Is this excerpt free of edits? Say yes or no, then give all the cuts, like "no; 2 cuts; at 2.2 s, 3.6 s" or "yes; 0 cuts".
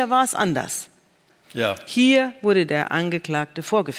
yes; 0 cuts